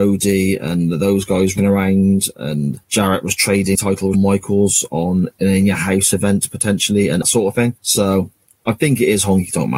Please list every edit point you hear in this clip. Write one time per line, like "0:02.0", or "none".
0:01.6
0:02.8
0:03.7
0:04.1
0:07.2
0:07.8